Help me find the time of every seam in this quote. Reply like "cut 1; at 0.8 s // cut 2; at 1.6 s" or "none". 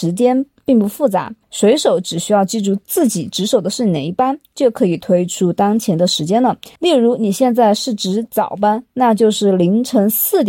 cut 1; at 1.4 s // cut 2; at 6.8 s